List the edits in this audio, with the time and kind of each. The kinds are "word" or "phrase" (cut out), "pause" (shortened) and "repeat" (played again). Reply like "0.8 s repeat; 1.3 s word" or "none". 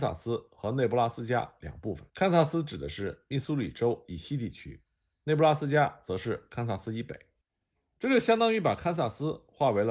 2.1 s pause